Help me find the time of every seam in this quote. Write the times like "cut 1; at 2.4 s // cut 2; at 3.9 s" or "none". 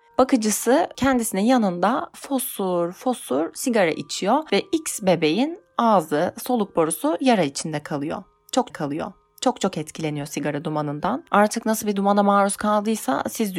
cut 1; at 8.7 s